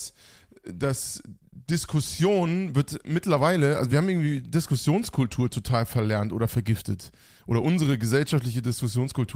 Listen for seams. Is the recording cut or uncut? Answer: uncut